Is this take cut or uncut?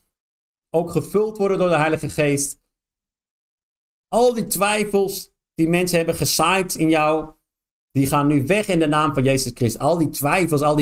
uncut